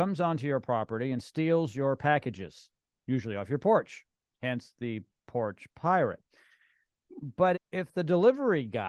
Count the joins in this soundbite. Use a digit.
1